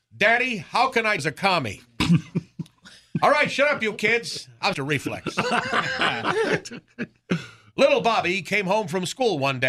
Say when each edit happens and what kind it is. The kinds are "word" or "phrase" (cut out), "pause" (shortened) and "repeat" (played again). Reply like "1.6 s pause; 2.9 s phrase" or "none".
1.2 s phrase; 4.7 s phrase